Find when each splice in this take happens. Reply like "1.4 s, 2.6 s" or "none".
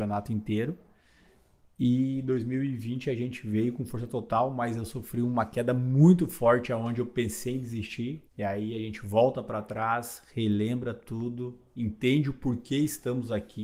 8.3 s